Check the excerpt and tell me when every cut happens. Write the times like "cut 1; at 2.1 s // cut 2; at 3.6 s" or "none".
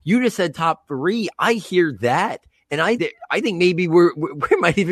cut 1; at 3.0 s